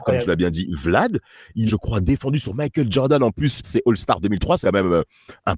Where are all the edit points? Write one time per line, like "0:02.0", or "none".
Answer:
0:01.7
0:03.6
0:04.6